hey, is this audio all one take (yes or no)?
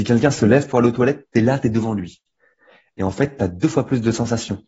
yes